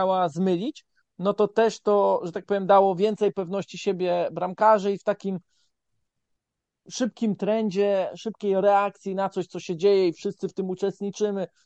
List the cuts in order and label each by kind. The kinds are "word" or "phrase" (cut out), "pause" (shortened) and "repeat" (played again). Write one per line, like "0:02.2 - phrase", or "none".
none